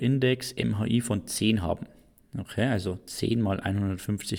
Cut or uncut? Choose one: uncut